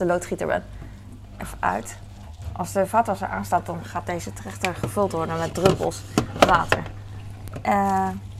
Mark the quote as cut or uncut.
uncut